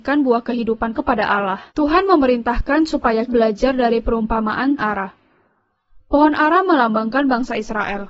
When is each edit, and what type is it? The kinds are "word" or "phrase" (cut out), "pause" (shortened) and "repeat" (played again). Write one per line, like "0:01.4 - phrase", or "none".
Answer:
0:00.9 - word
0:01.7 - pause
0:03.3 - word
0:04.8 - phrase